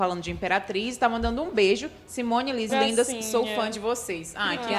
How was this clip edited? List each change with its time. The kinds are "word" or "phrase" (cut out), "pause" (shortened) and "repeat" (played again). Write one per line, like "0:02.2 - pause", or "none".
0:02.7 - phrase